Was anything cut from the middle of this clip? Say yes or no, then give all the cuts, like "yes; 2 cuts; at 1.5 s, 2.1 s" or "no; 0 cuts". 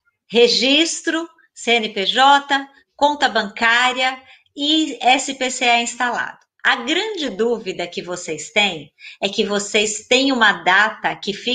no; 0 cuts